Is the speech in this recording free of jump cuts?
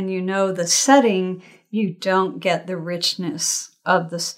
yes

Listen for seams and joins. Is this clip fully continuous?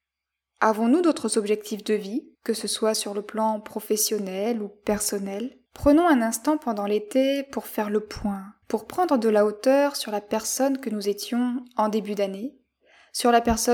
no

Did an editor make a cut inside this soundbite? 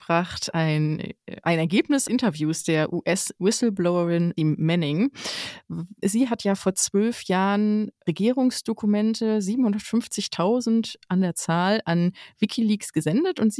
yes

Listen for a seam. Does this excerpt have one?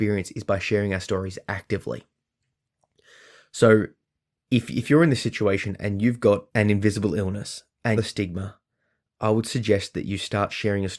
yes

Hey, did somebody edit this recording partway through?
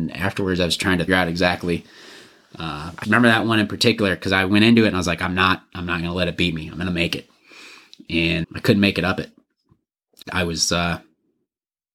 yes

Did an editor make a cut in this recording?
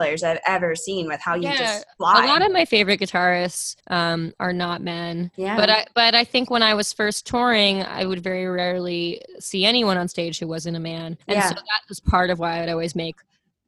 yes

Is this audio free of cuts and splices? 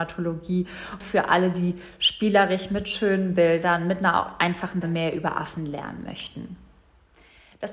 no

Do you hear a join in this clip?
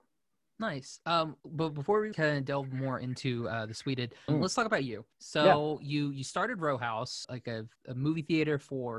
yes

